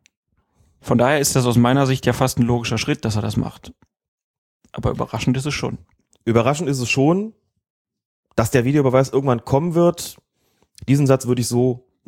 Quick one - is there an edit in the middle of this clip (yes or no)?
no